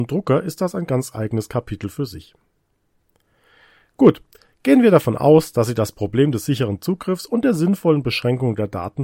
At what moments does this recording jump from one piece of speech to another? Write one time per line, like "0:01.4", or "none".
none